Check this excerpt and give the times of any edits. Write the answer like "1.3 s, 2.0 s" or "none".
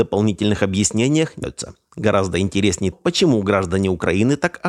1.4 s, 2.9 s